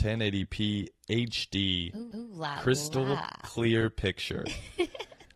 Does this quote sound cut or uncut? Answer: cut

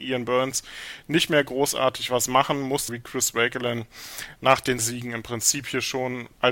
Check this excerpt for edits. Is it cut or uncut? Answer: cut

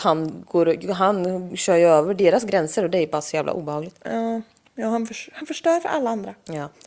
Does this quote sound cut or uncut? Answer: uncut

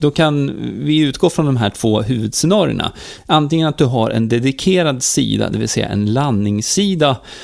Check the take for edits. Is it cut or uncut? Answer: uncut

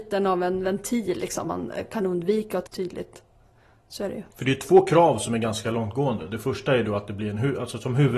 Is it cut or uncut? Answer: cut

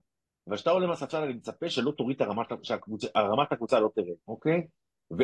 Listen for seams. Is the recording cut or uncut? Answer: cut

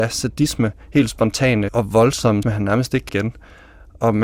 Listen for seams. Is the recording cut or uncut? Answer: cut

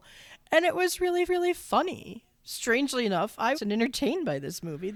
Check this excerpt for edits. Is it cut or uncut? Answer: cut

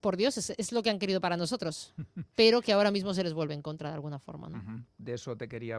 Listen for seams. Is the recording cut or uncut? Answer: uncut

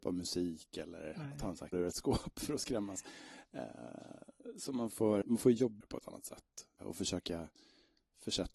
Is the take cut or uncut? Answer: cut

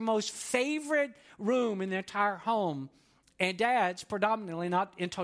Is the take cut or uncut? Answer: uncut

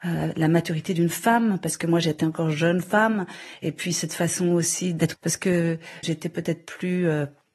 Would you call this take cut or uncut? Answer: cut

